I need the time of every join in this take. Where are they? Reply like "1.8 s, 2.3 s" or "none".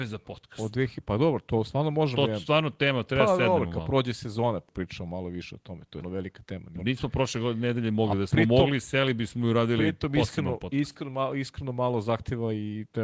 4.7 s, 6.0 s, 6.8 s